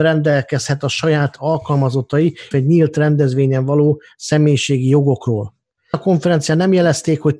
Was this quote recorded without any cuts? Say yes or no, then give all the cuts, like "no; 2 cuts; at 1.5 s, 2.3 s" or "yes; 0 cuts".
no; 2 cuts; at 2.5 s, 5.9 s